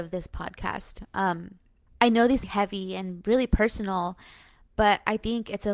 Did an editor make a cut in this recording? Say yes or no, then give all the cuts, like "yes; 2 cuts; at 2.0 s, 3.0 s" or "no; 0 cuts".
yes; 1 cut; at 2.4 s